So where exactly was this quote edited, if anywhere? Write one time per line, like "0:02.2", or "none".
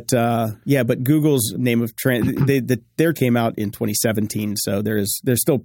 0:01.5
0:03.1